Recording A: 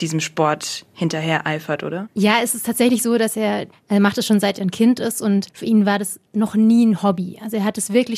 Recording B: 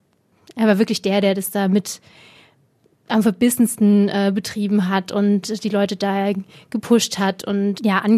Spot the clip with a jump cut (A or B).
A